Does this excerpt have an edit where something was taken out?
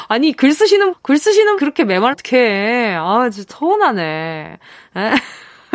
yes; 4 cuts; at 0.9 s, 1.6 s, 2.1 s, 3.5 s

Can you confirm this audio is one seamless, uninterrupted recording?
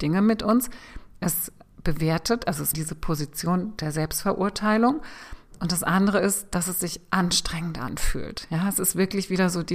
no; 1 cut; at 2.7 s

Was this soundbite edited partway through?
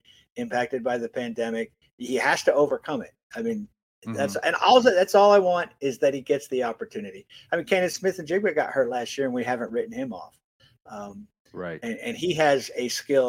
no; 0 cuts

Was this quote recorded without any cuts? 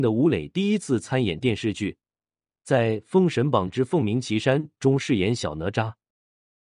yes; 0 cuts

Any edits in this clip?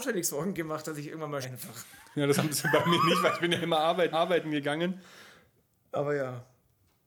yes; 2 cuts; at 1.4 s, 4.1 s

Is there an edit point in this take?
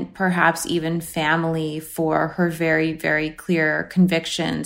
no; 0 cuts

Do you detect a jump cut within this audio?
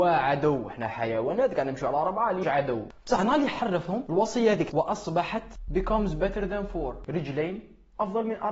yes; 3 cuts; at 2.4 s, 4.7 s, 5.7 s

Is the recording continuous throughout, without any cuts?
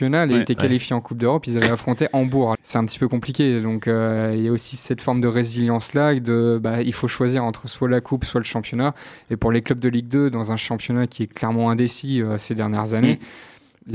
no; 1 cut; at 2.5 s

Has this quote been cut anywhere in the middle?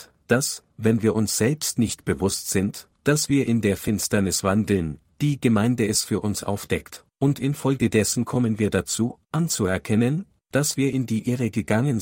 no; 0 cuts

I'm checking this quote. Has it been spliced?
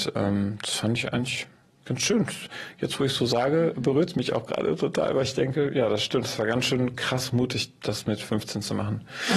no; 0 cuts

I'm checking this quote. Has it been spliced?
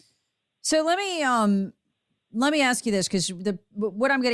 no; 0 cuts

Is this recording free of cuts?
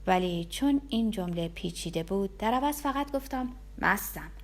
yes; 0 cuts

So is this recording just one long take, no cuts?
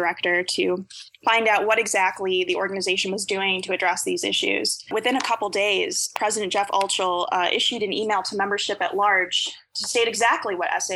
yes; 0 cuts

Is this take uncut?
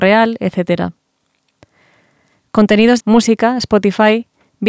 no; 1 cut; at 3.0 s

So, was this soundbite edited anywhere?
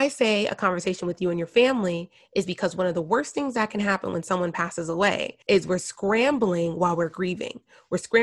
yes; 1 cut; at 5.4 s

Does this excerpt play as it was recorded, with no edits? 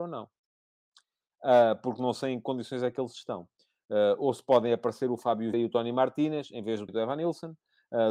no; 2 cuts; at 5.5 s, 6.9 s

